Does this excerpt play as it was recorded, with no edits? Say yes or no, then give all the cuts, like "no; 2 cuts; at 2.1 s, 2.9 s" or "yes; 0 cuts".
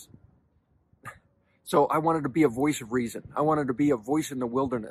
yes; 0 cuts